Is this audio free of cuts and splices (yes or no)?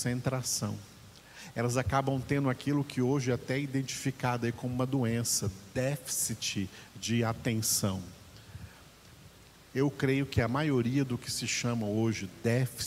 yes